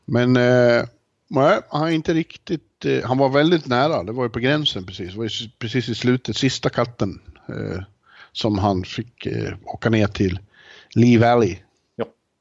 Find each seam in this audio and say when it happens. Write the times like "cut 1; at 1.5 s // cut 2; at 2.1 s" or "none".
none